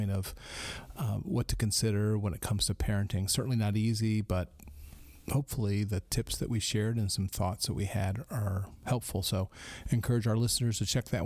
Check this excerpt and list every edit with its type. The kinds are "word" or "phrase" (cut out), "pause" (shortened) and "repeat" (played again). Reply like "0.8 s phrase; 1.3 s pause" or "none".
none